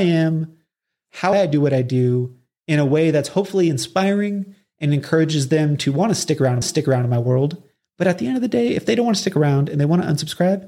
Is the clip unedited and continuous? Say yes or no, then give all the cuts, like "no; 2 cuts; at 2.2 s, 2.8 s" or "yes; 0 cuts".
no; 2 cuts; at 1.3 s, 6.6 s